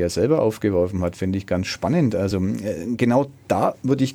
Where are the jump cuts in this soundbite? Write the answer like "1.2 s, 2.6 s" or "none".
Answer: none